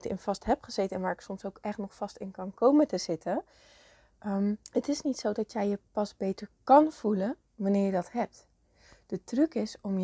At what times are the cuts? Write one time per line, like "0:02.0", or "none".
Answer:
0:04.6